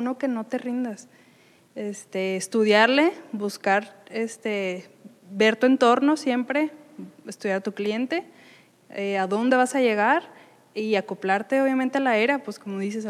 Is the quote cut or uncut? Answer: uncut